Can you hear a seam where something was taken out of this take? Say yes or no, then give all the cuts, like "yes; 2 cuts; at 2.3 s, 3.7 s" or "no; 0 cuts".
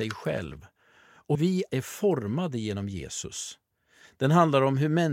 yes; 2 cuts; at 1.3 s, 1.7 s